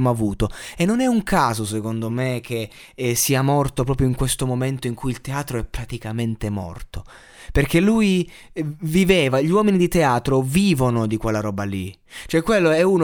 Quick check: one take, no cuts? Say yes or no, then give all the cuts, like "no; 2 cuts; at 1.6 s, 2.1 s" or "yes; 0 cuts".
yes; 0 cuts